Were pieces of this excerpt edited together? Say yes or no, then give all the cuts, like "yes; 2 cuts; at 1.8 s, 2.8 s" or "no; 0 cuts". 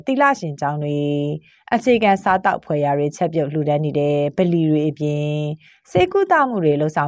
no; 0 cuts